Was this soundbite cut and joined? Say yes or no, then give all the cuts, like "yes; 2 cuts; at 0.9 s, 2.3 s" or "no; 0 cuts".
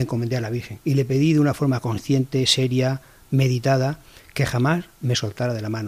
no; 0 cuts